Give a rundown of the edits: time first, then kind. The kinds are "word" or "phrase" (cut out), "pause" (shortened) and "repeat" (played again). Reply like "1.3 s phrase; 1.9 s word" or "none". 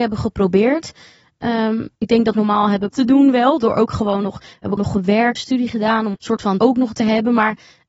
2.0 s pause; 2.3 s phrase; 2.9 s word; 4.8 s word; 5.4 s phrase; 6.1 s word; 6.6 s word